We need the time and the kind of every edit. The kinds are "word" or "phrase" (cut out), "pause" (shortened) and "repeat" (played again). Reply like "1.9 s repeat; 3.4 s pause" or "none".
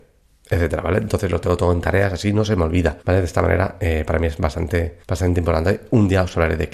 3.0 s pause; 5.0 s pause